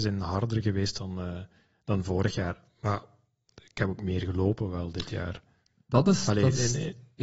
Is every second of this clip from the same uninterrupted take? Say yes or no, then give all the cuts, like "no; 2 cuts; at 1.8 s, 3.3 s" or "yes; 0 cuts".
yes; 0 cuts